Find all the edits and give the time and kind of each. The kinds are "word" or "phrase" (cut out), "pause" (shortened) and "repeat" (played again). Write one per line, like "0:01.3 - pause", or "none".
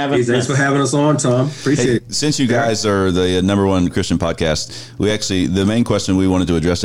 none